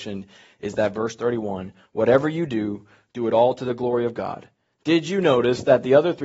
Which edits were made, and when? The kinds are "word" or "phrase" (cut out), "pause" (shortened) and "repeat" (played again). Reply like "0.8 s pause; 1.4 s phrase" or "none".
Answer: none